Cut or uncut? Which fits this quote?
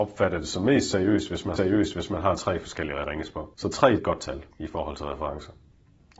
cut